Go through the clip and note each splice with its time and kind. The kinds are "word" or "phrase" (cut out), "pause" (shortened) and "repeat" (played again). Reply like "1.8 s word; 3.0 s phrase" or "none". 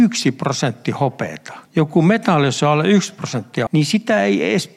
1.7 s pause; 3.7 s word